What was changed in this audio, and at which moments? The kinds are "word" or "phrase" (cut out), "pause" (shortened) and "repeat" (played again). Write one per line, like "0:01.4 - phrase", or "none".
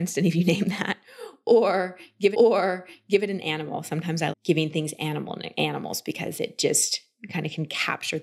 0:02.3 - repeat
0:04.3 - word